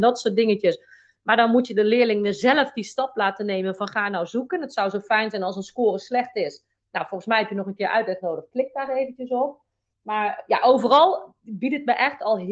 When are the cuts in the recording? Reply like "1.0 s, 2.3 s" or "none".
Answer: none